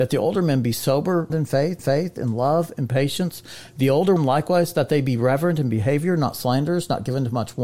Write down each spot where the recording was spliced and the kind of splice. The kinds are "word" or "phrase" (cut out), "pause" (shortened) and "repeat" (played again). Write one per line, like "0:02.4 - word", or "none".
0:01.3 - phrase
0:01.8 - repeat
0:04.2 - word